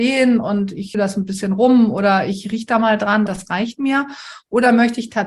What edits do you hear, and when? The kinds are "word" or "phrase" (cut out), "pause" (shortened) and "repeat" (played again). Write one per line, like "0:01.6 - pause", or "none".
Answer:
0:00.9 - word
0:03.3 - word

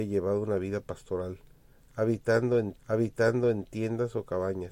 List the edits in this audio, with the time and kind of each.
0:02.7 - repeat

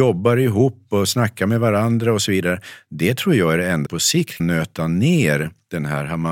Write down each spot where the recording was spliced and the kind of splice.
0:03.9 - word
0:04.4 - word

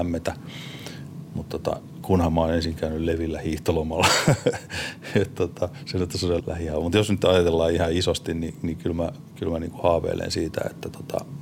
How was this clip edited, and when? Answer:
0:06.4 - word

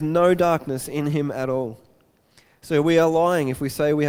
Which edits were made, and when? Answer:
none

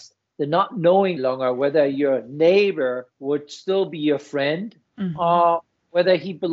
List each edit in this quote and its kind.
0:01.2 - word
0:03.1 - pause

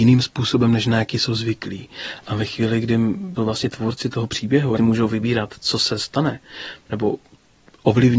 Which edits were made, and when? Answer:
0:03.4 - phrase
0:04.8 - phrase

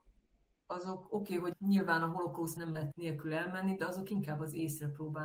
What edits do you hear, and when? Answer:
0:01.5 - word
0:02.6 - word
0:02.9 - word

